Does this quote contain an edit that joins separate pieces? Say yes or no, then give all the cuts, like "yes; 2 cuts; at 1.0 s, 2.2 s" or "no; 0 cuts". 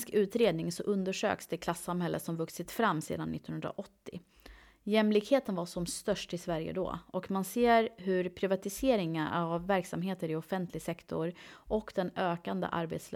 no; 0 cuts